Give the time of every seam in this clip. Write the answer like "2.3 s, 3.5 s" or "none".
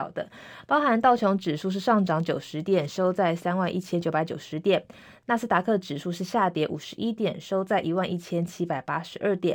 none